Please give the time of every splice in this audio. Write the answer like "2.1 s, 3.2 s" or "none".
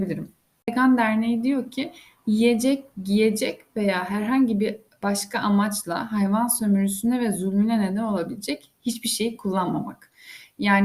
none